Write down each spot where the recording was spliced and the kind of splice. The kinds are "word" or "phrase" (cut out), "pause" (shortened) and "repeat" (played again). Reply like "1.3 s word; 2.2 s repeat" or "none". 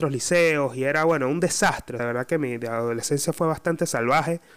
2.0 s word